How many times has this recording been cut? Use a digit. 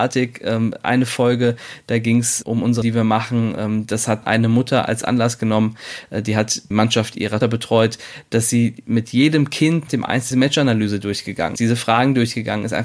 8